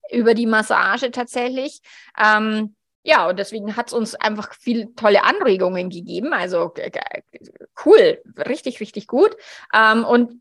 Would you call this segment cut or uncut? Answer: uncut